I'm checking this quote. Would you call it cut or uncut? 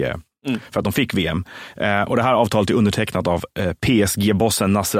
uncut